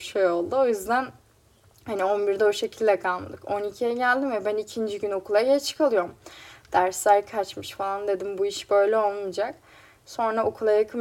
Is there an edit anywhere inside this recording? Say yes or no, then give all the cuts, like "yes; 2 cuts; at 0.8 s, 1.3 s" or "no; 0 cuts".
no; 0 cuts